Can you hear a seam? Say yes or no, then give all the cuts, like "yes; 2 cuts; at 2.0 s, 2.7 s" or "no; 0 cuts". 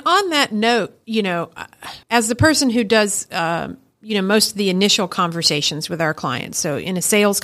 yes; 1 cut; at 2.0 s